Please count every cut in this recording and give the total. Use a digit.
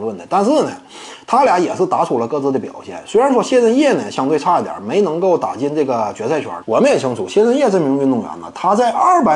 1